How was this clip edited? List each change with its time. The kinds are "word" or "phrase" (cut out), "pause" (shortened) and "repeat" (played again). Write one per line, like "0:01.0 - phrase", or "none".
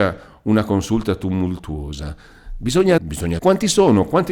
0:03.0 - word
0:03.4 - word